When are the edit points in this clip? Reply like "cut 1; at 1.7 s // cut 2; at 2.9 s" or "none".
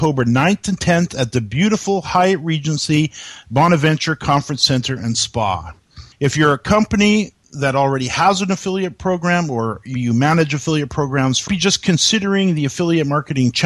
cut 1; at 6.1 s // cut 2; at 9.9 s // cut 3; at 11.5 s